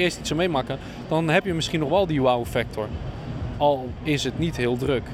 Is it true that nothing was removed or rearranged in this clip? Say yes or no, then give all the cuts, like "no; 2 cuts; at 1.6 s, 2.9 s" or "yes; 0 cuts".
yes; 0 cuts